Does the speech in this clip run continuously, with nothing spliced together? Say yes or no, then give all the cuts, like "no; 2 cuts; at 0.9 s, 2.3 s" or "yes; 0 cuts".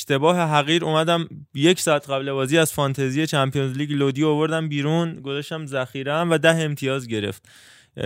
yes; 0 cuts